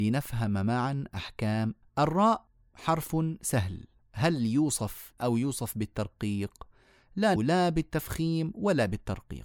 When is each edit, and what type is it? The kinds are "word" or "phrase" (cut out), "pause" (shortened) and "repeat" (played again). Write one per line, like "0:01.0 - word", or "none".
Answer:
0:01.8 - word
0:05.2 - word
0:07.4 - word